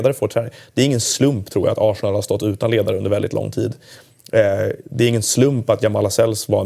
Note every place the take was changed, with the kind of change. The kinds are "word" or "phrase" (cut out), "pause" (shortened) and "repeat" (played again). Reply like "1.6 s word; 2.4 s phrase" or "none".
none